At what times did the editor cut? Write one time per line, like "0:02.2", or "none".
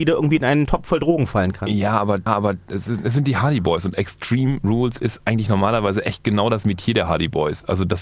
0:02.3

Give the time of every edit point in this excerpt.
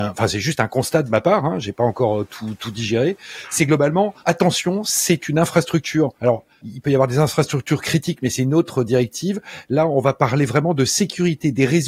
0:04.2
0:06.1

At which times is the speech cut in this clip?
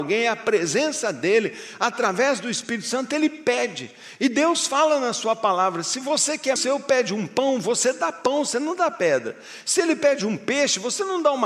0:06.6

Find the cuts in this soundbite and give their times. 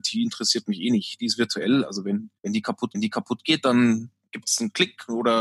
0:02.4
0:02.9
0:04.3

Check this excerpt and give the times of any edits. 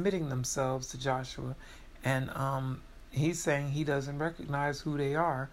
none

